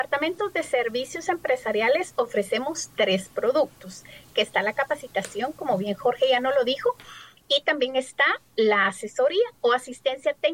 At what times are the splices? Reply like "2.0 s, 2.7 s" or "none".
none